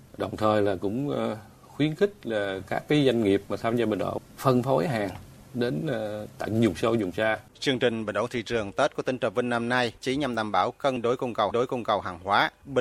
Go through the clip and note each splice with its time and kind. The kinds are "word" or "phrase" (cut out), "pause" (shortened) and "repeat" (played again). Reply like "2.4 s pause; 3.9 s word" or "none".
7.5 s pause; 10.0 s word; 11.5 s repeat